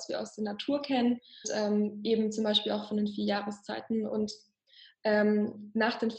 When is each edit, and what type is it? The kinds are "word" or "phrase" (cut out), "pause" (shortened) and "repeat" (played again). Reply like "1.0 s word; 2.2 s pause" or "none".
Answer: 1.4 s word